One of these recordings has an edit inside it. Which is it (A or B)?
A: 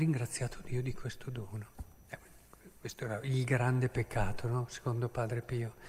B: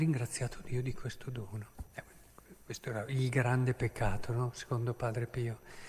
B